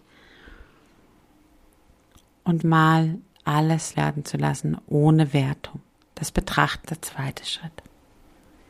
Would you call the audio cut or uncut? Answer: cut